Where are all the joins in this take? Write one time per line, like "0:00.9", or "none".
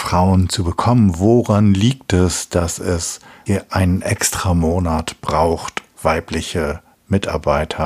0:03.5
0:05.9